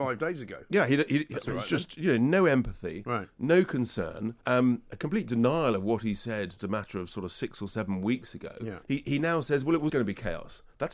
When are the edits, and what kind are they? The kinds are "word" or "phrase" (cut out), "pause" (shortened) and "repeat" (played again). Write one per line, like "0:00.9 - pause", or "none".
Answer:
0:04.4 - pause
0:06.6 - word
0:08.8 - pause
0:09.9 - word

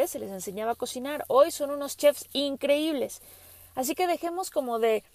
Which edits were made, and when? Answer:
none

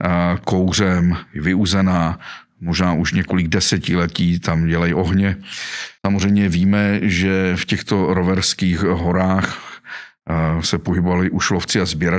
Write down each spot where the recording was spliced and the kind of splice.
0:06.0 - pause

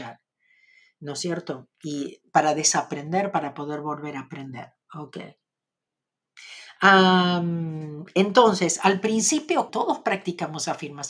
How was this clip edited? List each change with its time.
0:04.8 - pause
0:09.7 - word

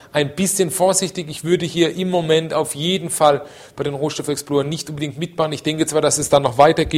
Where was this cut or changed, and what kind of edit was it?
none

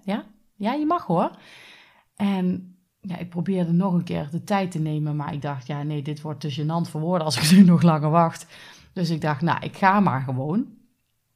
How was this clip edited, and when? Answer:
none

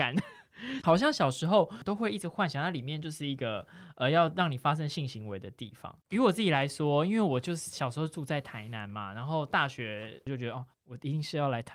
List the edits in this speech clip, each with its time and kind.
0:06.0 - pause
0:10.7 - pause

